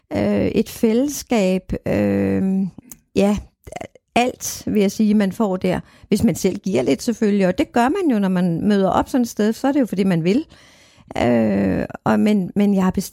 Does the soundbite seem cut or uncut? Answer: uncut